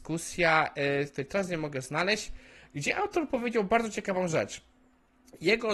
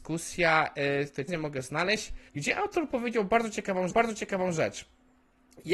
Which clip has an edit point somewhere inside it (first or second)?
second